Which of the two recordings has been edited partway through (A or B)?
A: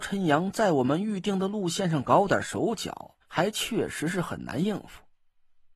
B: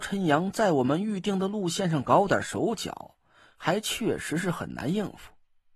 A